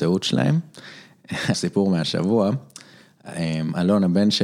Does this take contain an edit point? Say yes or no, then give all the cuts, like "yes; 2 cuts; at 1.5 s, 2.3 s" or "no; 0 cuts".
yes; 1 cut; at 1.5 s